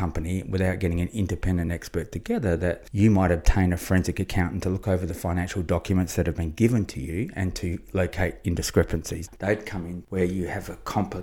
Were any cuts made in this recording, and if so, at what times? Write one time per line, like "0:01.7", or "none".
none